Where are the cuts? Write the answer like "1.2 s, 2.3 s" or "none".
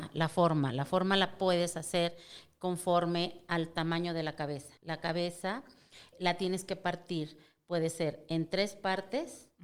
4.8 s, 6.1 s